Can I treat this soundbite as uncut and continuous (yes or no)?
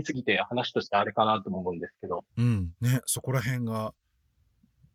no